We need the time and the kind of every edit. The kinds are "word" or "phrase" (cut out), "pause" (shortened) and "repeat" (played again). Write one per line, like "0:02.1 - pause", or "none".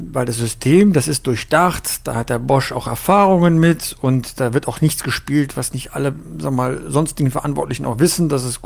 none